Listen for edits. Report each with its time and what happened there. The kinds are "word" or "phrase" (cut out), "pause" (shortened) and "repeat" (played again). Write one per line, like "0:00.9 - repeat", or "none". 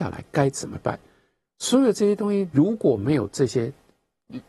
none

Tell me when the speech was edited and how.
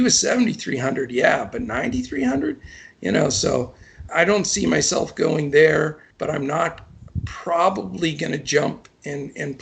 0:04.1 - word
0:06.1 - pause

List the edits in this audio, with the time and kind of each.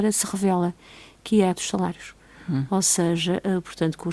0:01.5 - word

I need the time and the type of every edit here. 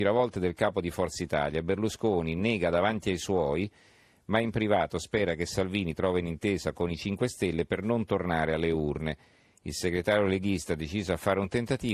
none

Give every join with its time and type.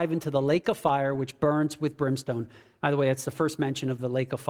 none

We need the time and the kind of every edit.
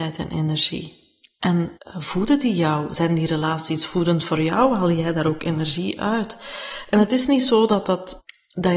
0:01.8 - pause

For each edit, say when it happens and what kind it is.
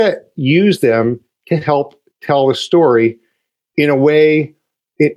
none

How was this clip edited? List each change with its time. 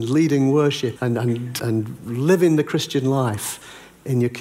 0:01.0 - word
0:01.6 - word

